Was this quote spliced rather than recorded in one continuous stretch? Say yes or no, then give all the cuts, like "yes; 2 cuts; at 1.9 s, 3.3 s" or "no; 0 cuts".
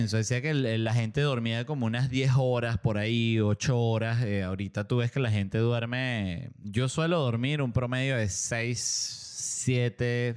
no; 0 cuts